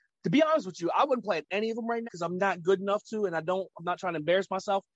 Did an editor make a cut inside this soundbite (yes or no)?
yes